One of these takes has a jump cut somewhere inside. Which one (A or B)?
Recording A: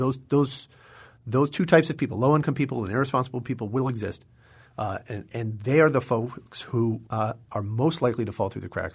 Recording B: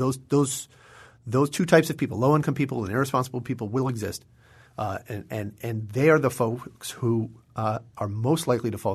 A